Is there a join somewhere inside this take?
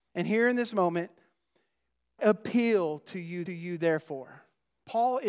yes; 2 cuts; at 2.2 s, 3.5 s

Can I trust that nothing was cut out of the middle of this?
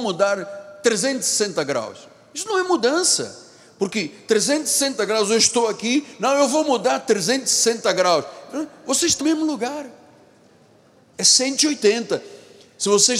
no; 1 cut; at 9.2 s

